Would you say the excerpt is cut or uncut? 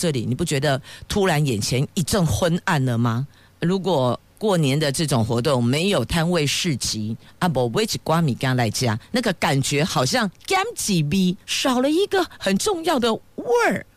cut